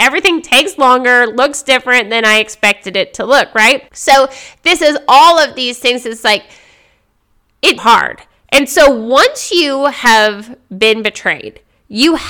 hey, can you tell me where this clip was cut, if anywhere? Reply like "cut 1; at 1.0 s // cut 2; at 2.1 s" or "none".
cut 1; at 3.9 s // cut 2; at 7.8 s

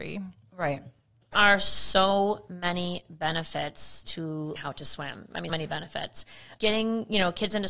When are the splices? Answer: cut 1; at 1.3 s // cut 2; at 4.6 s // cut 3; at 5.5 s

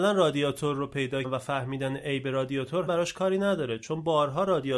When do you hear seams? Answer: cut 1; at 1.2 s // cut 2; at 2.9 s

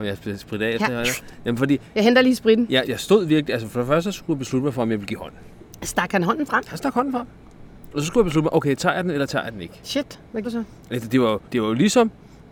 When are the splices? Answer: cut 1; at 2.9 s // cut 2; at 10.4 s // cut 3; at 11.4 s

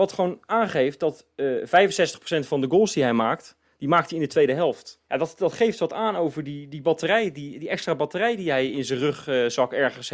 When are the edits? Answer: cut 1; at 5.0 s

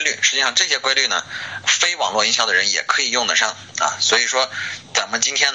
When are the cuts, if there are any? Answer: cut 1; at 1.6 s

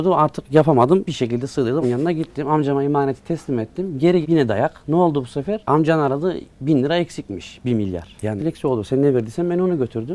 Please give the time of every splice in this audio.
cut 1; at 1.8 s // cut 2; at 4.2 s // cut 3; at 8.4 s

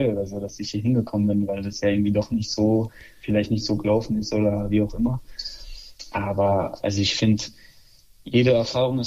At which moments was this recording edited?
none

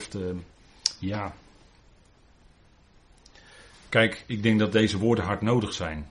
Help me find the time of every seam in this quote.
none

